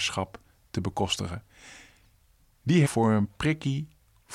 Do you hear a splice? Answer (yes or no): yes